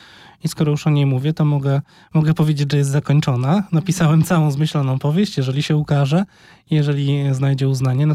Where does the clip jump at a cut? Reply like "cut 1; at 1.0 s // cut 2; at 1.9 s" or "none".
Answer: none